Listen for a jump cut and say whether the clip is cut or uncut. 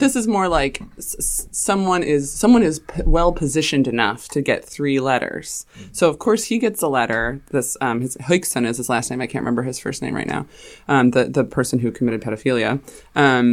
uncut